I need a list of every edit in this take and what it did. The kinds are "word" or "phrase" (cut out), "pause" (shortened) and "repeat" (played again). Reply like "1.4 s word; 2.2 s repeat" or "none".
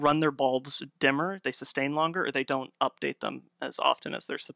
1.4 s phrase

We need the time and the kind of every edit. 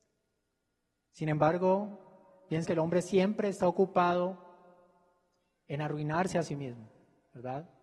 2.6 s word

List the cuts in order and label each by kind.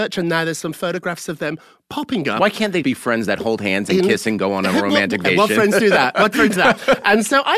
2.8 s word; 5.2 s word; 6.6 s word

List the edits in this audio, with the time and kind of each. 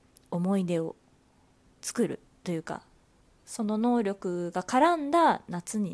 none

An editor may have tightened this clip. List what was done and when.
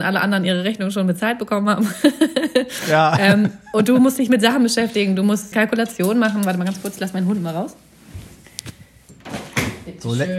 5.5 s word

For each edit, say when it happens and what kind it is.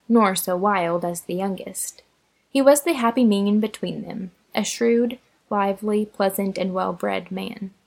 none

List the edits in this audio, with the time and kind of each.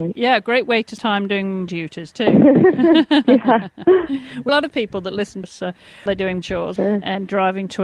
1.0 s word; 1.7 s word; 4.5 s word; 5.4 s word; 6.1 s word; 6.4 s word; 6.8 s word

